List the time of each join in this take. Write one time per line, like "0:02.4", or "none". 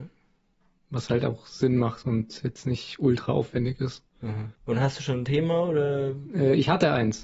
0:04.6